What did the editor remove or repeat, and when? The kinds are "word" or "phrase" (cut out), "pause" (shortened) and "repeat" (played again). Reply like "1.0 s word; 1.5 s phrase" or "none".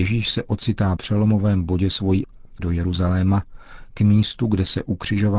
1.0 s word; 2.2 s word; 2.6 s word